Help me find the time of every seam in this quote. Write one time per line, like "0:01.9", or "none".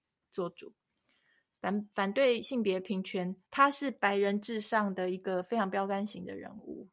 0:03.4

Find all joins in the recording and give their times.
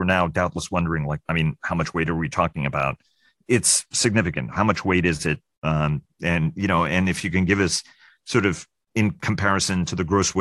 0:01.2

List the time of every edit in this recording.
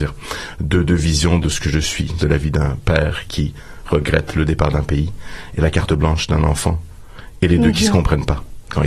0:01.4
0:02.2

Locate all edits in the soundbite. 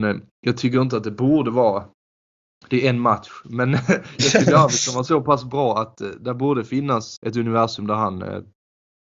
0:07.2

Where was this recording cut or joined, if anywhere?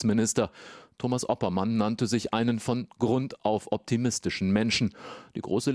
none

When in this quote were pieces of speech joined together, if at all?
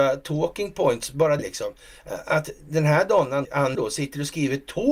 0:01.4
0:03.4
0:03.7

